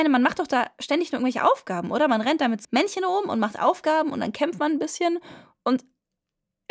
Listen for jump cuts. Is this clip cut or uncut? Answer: cut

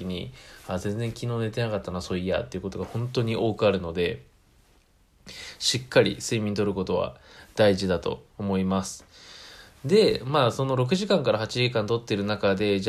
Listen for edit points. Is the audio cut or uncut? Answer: cut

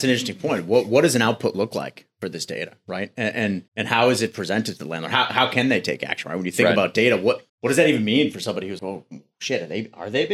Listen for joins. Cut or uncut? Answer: cut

